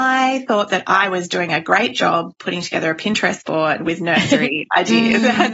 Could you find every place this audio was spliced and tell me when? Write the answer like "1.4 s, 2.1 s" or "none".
none